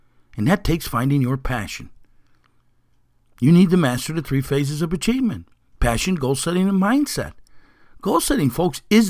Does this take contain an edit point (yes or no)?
no